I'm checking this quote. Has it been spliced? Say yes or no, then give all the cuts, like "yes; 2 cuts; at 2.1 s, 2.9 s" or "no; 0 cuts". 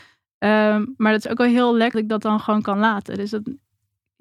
yes; 1 cut; at 1.9 s